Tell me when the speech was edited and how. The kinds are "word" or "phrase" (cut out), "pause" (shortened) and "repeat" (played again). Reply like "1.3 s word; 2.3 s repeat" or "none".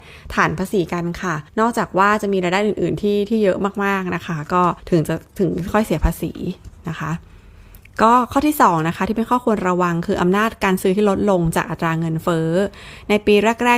1.5 s pause; 4.8 s pause